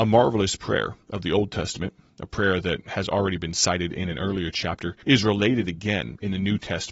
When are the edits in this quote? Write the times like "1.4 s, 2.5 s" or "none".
5.0 s